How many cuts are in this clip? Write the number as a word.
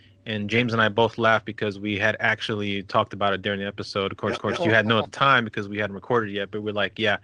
one